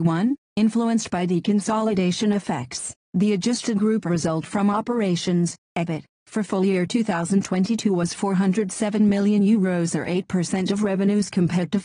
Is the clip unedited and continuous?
yes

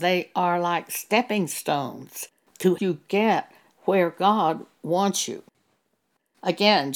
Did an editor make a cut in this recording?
yes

